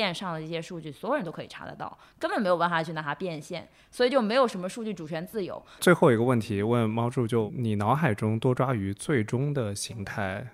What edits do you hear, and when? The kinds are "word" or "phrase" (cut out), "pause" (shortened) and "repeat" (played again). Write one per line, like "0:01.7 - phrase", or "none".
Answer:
none